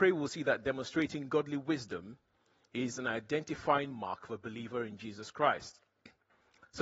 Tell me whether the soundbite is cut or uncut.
uncut